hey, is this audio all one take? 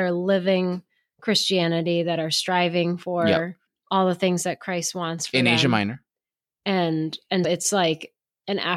no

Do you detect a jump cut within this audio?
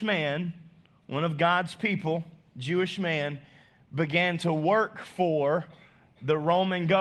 no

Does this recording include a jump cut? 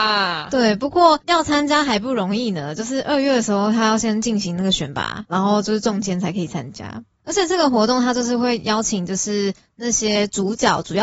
no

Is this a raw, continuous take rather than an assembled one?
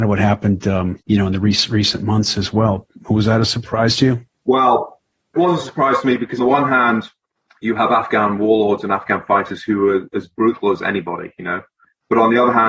no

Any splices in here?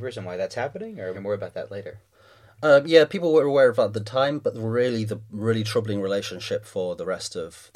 yes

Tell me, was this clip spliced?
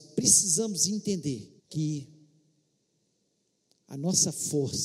yes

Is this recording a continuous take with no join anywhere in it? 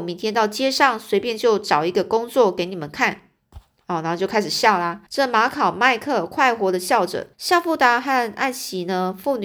no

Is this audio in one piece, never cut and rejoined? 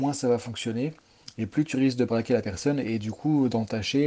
yes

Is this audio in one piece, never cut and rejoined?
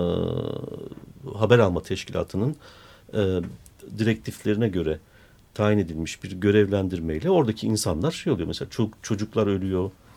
yes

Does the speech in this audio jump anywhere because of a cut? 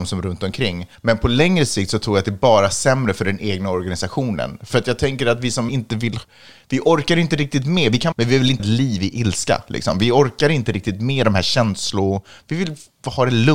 yes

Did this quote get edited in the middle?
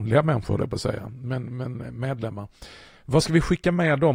no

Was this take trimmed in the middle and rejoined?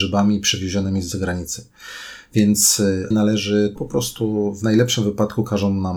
yes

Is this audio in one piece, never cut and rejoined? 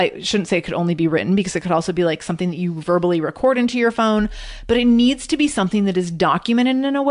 yes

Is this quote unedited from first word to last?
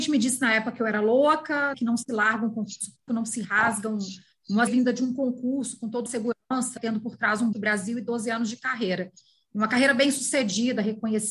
no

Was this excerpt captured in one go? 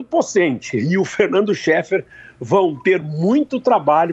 yes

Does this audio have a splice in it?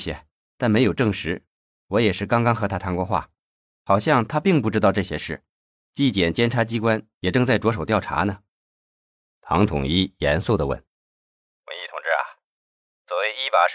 no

